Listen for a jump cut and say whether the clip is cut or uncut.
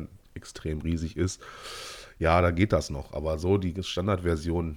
uncut